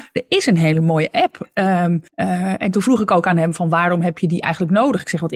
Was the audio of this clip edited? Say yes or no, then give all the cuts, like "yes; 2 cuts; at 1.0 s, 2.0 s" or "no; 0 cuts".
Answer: yes; 1 cut; at 2.1 s